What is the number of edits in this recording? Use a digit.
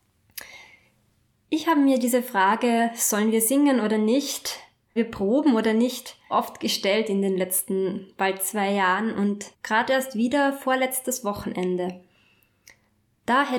3